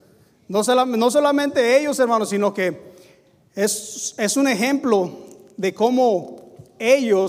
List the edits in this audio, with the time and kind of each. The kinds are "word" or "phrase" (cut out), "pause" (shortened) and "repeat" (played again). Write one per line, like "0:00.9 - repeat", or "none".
none